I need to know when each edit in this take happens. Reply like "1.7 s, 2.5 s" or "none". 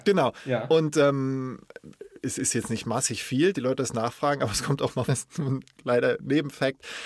3.5 s, 5.1 s